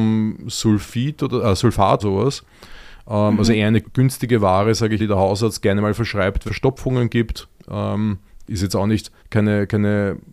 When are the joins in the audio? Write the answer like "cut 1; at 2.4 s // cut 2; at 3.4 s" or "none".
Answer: cut 1; at 2.0 s // cut 2; at 3.8 s // cut 3; at 5.0 s // cut 4; at 6.5 s // cut 5; at 8.4 s // cut 6; at 9.2 s